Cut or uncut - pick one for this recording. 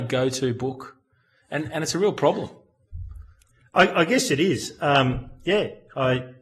uncut